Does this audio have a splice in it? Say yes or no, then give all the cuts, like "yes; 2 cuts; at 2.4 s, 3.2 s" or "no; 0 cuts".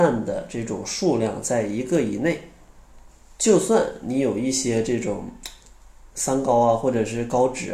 yes; 2 cuts; at 3.1 s, 6.1 s